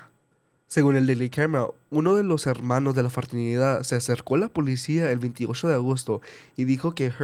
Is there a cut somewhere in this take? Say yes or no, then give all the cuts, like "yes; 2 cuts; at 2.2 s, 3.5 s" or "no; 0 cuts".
no; 0 cuts